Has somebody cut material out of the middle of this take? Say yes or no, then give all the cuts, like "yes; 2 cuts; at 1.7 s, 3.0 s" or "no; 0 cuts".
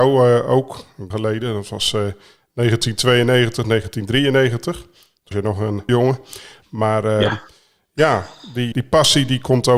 yes; 4 cuts; at 1.1 s, 5.3 s, 5.9 s, 8.7 s